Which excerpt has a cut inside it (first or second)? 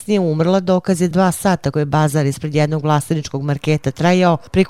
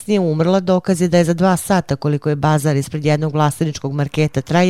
first